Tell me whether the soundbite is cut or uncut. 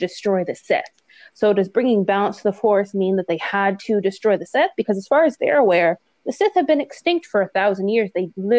uncut